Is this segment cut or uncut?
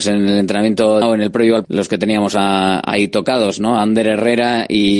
cut